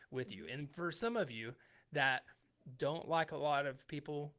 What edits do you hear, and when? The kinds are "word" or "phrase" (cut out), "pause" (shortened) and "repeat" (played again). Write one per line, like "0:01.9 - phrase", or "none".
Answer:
none